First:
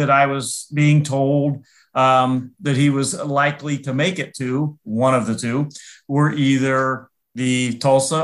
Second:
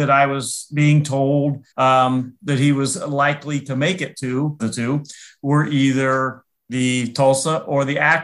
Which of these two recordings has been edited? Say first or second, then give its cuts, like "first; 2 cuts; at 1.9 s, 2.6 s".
second; 2 cuts; at 1.7 s, 4.6 s